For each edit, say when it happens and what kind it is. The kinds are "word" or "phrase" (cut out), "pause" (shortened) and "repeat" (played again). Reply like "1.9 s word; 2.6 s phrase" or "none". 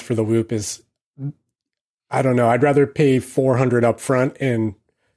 none